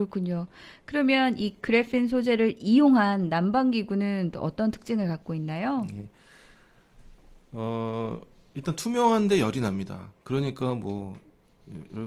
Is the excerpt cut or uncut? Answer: uncut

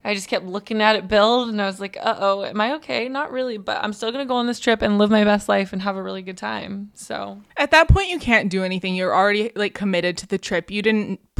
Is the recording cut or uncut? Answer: cut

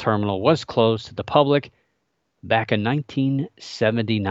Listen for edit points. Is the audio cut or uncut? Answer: uncut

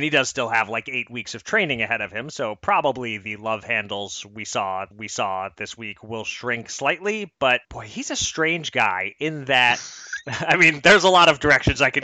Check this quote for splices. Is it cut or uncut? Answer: cut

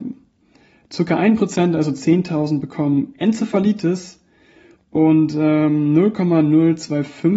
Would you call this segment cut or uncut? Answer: uncut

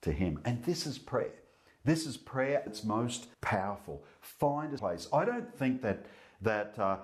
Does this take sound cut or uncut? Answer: cut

